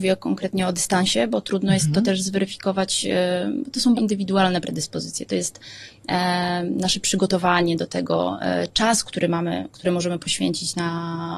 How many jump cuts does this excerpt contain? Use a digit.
1